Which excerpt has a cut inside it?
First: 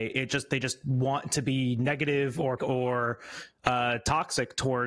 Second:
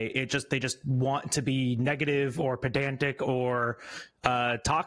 first; 1 cut; at 2.6 s

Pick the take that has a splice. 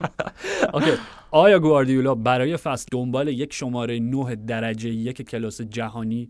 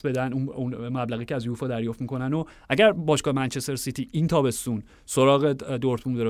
first; 1 cut; at 2.9 s

